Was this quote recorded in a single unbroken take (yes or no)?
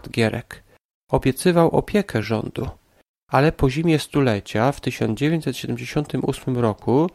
yes